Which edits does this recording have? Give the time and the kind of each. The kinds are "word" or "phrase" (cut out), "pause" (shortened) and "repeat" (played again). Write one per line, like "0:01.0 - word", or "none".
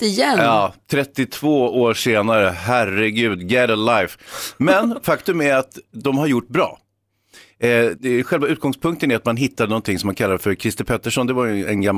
0:06.5 - phrase
0:08.0 - word